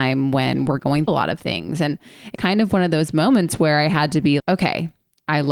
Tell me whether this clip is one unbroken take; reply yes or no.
no